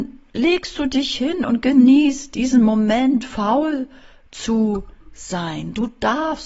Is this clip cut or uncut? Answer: uncut